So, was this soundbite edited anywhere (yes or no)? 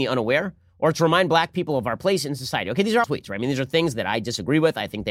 yes